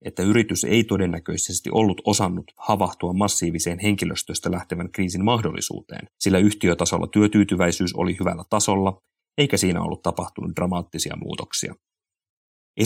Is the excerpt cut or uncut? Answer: uncut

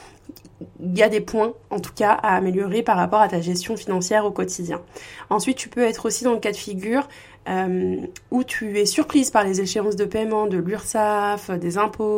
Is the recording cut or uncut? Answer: uncut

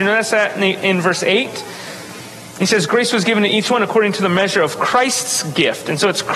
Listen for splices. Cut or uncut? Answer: uncut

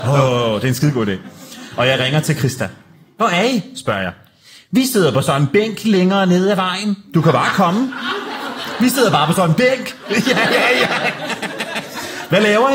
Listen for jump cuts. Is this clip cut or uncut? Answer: uncut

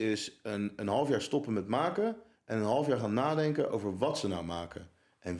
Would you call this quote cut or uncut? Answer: uncut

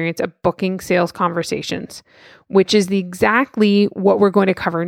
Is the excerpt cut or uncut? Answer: uncut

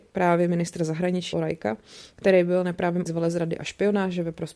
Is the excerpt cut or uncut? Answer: cut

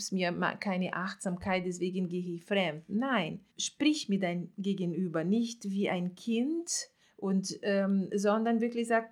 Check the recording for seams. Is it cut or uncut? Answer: cut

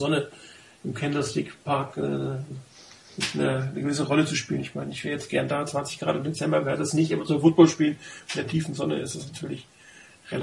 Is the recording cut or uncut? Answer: uncut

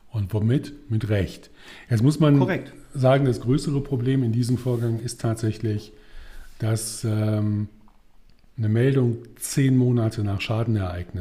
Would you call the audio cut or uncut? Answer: uncut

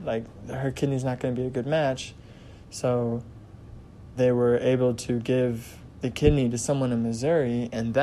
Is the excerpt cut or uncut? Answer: cut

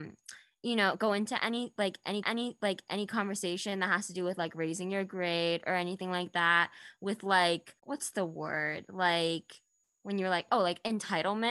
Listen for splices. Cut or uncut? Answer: cut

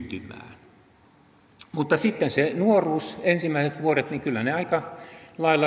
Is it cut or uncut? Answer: uncut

